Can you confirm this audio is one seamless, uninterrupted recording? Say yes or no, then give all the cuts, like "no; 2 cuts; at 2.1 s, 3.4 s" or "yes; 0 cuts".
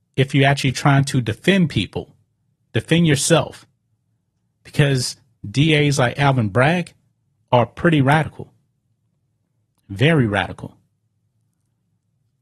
yes; 0 cuts